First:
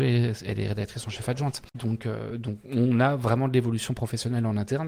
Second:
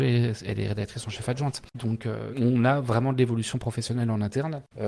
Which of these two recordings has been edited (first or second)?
second